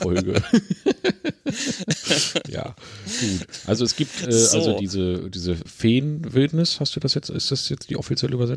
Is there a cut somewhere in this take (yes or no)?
yes